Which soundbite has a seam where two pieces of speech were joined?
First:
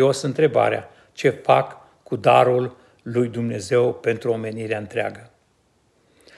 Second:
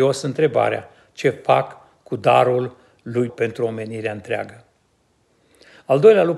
second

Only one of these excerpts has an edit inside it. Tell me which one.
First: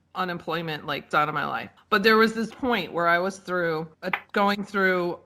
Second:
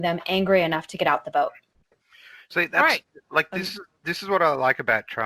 first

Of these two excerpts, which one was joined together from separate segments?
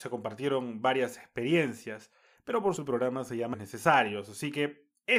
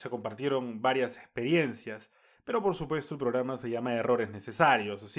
first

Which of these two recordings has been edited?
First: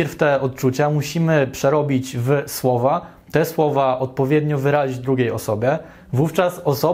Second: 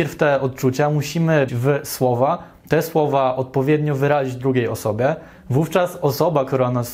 second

